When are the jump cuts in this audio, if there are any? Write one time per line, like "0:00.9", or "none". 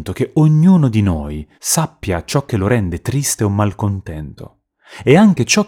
0:01.5